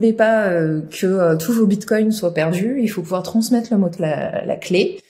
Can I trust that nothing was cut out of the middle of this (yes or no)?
no